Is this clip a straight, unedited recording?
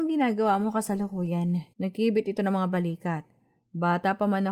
no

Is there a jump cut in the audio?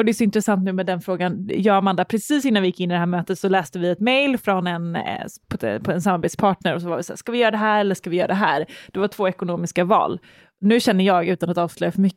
no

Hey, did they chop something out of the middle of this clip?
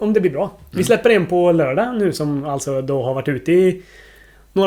no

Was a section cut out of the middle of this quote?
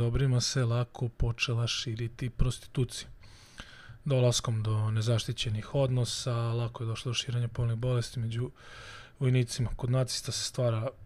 no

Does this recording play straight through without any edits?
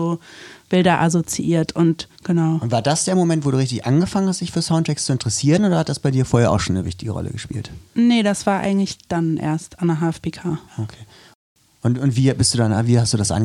no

